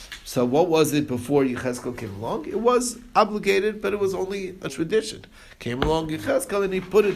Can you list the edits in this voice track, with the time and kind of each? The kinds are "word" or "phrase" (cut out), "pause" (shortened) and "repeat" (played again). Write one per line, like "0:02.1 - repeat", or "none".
0:04.7 - word